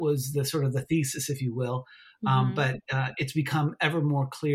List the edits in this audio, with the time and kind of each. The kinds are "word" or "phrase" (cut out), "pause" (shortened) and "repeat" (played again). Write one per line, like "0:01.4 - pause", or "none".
none